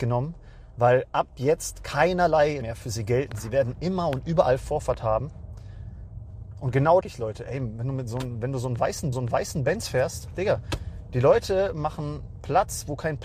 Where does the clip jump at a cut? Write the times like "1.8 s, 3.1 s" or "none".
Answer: 2.6 s, 7.0 s, 9.1 s